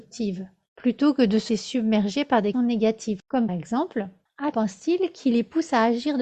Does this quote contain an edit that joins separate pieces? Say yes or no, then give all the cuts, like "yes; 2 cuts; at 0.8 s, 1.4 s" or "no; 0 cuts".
yes; 4 cuts; at 1.5 s, 2.5 s, 3.5 s, 4.5 s